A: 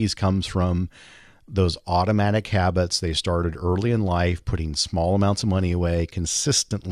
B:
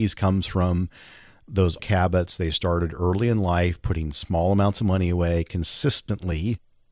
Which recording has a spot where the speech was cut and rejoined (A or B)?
B